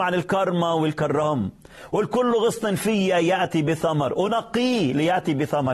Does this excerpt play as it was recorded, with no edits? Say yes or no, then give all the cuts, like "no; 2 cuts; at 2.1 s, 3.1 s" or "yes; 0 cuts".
yes; 0 cuts